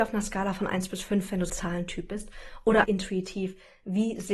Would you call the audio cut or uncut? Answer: cut